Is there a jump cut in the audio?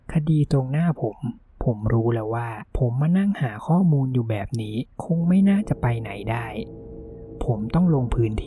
yes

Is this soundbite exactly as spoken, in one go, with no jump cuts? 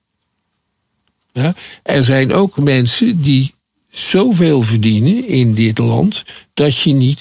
yes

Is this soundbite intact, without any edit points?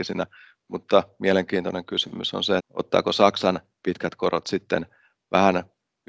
no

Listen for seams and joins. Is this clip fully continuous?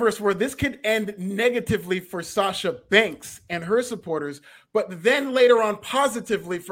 yes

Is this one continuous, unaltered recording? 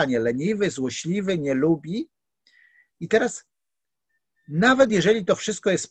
yes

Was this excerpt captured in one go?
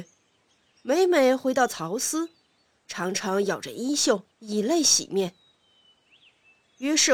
no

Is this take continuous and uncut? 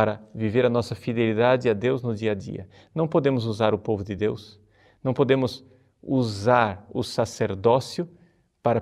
yes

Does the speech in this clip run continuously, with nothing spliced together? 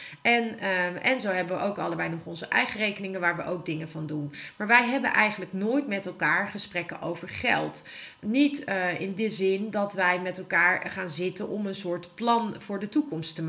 yes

